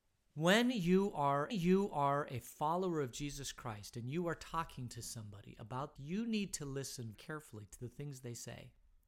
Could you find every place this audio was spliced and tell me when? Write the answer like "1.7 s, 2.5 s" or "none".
1.5 s, 6.0 s, 7.1 s